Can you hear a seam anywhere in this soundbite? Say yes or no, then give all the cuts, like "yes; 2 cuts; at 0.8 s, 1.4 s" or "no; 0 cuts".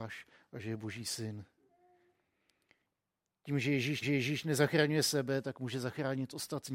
yes; 1 cut; at 4.0 s